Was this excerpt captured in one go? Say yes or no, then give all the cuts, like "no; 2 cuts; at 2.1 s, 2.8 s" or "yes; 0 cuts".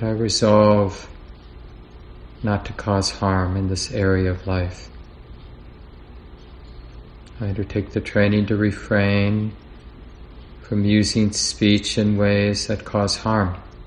yes; 0 cuts